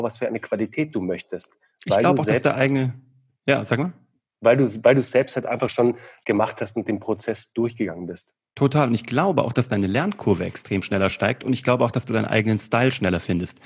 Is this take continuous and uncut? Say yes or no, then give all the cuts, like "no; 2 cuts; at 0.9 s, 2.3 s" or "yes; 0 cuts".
yes; 0 cuts